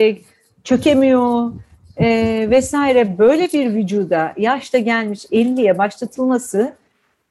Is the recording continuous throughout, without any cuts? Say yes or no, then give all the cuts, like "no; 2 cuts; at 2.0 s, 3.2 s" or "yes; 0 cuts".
yes; 0 cuts